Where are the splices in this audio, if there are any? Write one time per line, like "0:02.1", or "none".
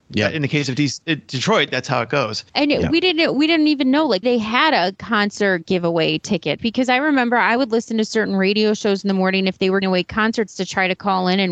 0:02.5
0:04.2
0:06.6
0:09.8
0:10.5